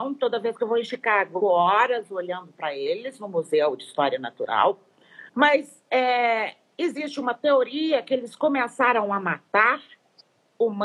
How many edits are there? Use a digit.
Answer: 2